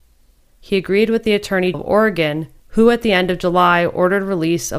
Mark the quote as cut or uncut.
cut